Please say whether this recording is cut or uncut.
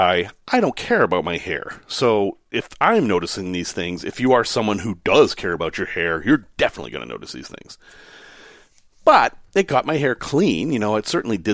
uncut